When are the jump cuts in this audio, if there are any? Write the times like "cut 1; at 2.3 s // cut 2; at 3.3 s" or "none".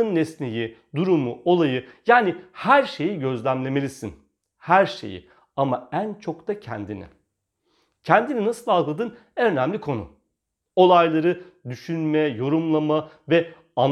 none